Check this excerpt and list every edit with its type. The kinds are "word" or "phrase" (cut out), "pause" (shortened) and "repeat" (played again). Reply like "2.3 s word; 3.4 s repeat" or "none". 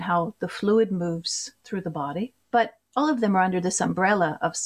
1.6 s pause; 2.4 s pause